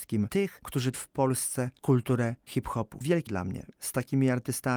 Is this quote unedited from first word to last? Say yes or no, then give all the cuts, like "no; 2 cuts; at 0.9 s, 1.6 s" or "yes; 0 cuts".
no; 3 cuts; at 0.9 s, 3.3 s, 3.7 s